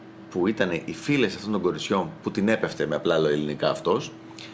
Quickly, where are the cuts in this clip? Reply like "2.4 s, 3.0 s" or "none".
none